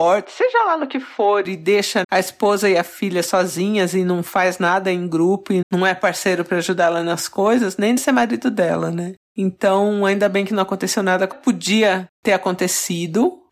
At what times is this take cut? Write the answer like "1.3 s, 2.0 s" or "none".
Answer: 2.0 s, 5.6 s, 8.0 s, 11.3 s